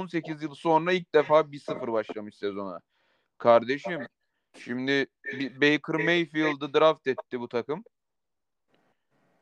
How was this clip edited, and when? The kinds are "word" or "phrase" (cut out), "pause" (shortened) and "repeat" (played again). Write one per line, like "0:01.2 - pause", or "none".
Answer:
none